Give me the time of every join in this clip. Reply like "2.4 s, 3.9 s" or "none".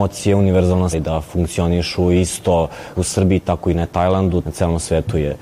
0.9 s, 2.9 s, 4.4 s